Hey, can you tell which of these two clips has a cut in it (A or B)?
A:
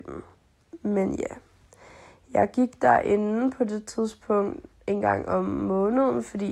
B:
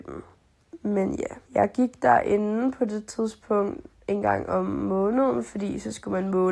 B